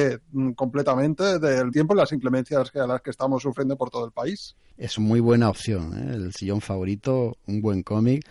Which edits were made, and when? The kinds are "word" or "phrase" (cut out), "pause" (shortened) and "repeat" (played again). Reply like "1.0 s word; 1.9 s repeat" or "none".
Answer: 1.7 s word; 5.0 s word